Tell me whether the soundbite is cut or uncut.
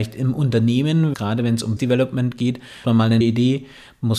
cut